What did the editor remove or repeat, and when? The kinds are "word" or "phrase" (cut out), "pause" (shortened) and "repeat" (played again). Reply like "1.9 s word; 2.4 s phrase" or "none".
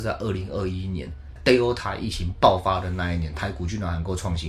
1.4 s word